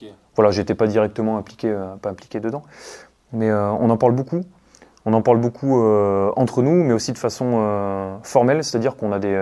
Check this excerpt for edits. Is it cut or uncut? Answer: uncut